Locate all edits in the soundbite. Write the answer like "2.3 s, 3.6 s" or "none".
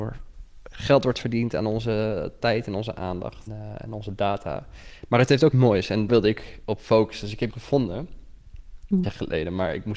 3.5 s, 5.5 s, 6.1 s, 7.5 s, 9.0 s

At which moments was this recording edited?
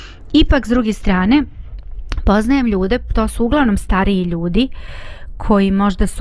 none

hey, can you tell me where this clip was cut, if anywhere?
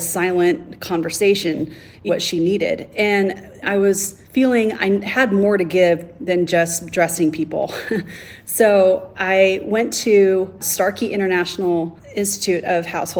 2.1 s, 3.6 s, 4.2 s

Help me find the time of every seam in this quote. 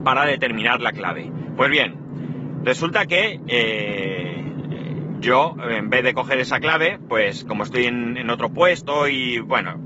none

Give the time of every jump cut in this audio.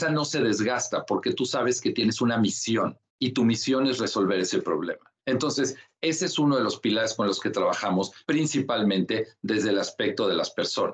3.1 s, 5.2 s, 8.2 s

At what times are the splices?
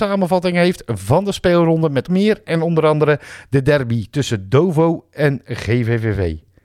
2.1 s

